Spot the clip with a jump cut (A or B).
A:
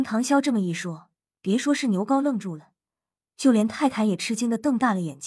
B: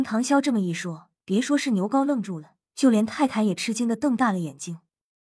B